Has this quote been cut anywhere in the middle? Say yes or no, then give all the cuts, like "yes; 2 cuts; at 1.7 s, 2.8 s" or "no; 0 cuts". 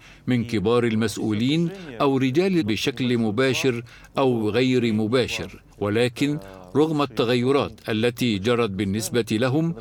yes; 2 cuts; at 2.6 s, 5.7 s